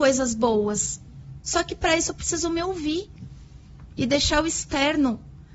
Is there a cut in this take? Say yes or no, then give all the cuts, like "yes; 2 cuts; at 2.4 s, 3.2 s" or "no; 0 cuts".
no; 0 cuts